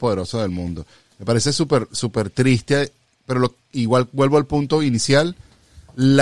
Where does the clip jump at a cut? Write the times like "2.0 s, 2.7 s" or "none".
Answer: none